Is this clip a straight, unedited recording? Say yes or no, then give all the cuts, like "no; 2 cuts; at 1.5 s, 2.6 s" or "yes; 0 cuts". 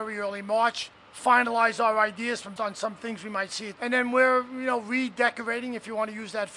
no; 3 cuts; at 0.9 s, 2.6 s, 3.8 s